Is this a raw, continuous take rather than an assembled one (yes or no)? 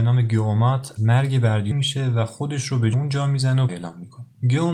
no